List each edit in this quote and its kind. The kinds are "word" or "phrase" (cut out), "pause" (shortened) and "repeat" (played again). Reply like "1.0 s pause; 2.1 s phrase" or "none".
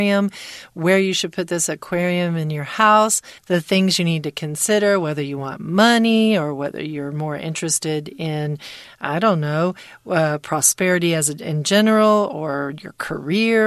3.4 s pause

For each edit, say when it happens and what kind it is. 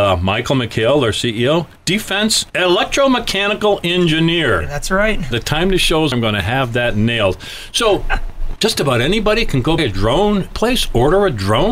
1.8 s phrase; 2.5 s pause; 5.3 s word; 6.1 s word; 8.6 s word; 9.8 s word; 10.5 s word

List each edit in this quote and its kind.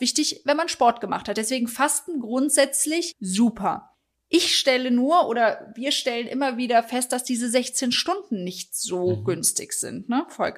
none

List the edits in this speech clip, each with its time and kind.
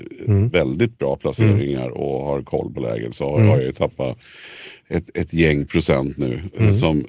none

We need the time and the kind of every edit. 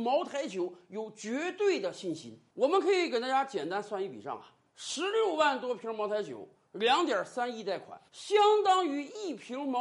8.1 s pause

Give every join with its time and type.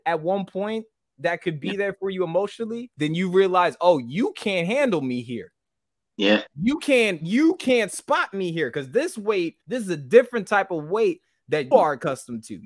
9.6 s pause; 11.7 s word

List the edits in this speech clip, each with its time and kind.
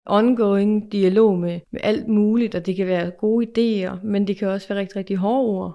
1.6 s pause

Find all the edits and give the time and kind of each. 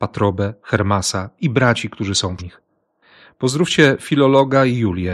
2.4 s word

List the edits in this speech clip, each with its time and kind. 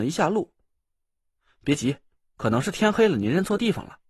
none

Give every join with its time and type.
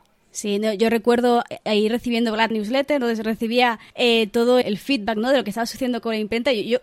2.5 s phrase; 3.9 s pause; 4.6 s word

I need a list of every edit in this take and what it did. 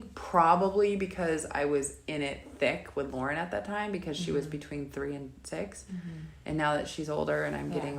6.4 s pause

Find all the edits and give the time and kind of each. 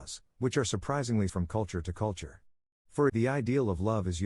1.3 s word; 3.1 s word

